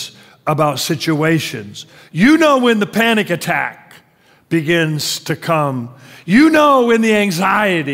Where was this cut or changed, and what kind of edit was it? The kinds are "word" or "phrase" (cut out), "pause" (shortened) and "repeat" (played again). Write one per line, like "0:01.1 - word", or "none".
none